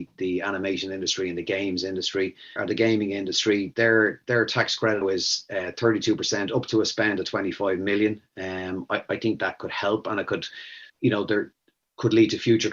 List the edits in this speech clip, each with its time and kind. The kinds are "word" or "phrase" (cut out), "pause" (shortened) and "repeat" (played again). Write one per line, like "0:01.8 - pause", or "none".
0:02.6 - word
0:05.0 - word
0:10.9 - pause